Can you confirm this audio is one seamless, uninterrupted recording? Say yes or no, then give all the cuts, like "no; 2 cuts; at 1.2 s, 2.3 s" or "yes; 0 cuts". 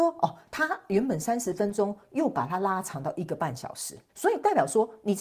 no; 1 cut; at 4.1 s